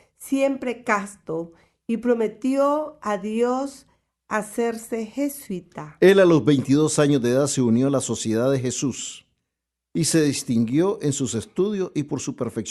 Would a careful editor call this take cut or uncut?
uncut